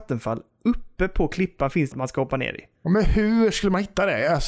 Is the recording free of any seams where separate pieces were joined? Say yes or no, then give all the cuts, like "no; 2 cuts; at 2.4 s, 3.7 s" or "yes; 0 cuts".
no; 1 cut; at 1.9 s